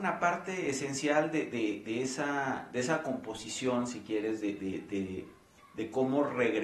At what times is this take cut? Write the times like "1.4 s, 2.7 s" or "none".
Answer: none